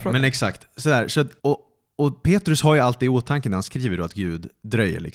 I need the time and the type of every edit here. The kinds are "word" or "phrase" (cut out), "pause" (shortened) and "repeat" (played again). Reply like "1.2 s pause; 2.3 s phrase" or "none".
1.4 s pause